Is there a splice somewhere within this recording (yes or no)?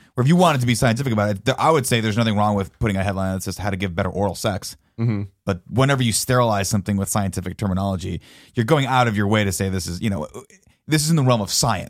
no